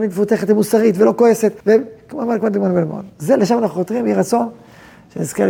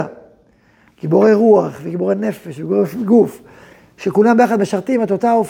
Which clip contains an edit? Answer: first; 1 cut; at 1.6 s

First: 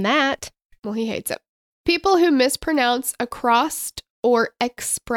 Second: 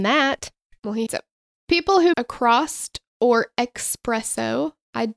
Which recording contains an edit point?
second; 2 cuts; at 1.1 s, 2.1 s

